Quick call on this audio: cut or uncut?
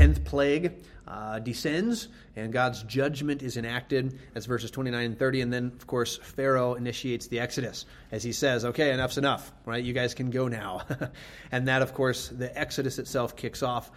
uncut